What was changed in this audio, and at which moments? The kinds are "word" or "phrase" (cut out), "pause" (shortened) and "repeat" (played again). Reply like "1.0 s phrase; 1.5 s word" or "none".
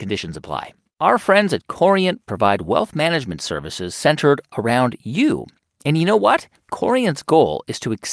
none